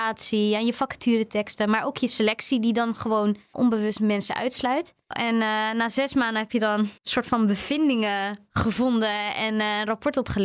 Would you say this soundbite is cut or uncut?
cut